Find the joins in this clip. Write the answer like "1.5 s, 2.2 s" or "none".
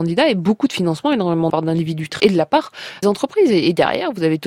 1.5 s, 2.2 s, 3.0 s